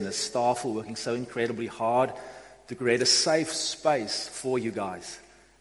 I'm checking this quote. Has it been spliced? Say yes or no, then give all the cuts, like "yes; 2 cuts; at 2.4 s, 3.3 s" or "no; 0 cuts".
no; 0 cuts